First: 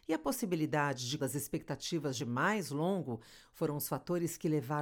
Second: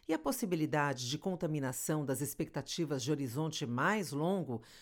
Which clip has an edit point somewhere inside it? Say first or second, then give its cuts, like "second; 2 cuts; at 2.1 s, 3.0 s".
first; 2 cuts; at 1.2 s, 2.2 s